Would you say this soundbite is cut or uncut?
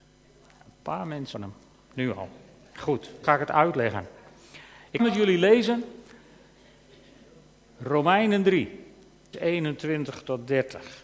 cut